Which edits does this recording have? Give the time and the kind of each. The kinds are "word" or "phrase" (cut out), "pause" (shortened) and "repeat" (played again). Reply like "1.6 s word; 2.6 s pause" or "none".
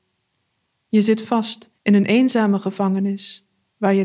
1.8 s pause